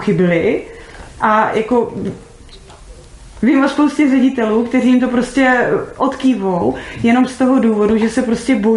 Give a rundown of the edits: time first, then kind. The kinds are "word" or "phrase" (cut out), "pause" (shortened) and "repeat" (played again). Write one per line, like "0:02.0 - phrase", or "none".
none